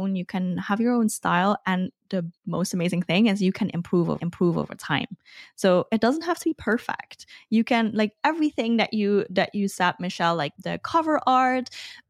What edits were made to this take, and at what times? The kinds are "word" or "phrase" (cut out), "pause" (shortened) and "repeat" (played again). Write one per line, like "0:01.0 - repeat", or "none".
0:02.4 - pause
0:04.2 - repeat
0:10.6 - word